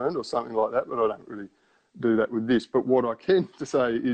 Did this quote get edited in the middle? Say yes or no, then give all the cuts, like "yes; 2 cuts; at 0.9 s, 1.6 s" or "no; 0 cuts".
no; 0 cuts